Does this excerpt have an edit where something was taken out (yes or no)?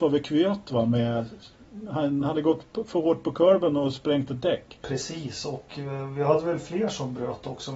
no